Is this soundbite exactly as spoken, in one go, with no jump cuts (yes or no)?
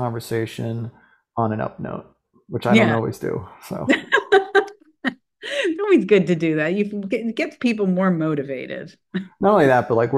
yes